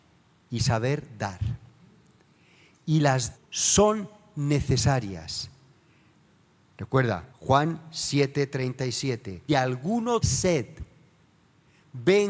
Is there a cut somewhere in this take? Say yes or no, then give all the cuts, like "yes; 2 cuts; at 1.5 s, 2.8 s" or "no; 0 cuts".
yes; 4 cuts; at 3.3 s, 7.3 s, 9.5 s, 10.2 s